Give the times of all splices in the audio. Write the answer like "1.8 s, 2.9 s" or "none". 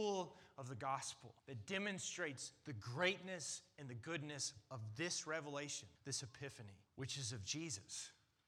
1.4 s, 6.0 s, 6.9 s